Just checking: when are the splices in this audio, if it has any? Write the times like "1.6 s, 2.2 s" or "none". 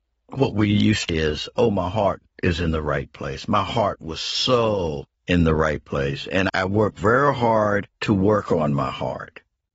1.1 s, 2.3 s, 5.1 s, 6.5 s, 7.9 s